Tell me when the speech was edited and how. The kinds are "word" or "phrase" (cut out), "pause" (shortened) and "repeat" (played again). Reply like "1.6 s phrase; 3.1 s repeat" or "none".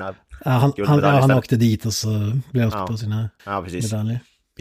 2.7 s word; 3.4 s pause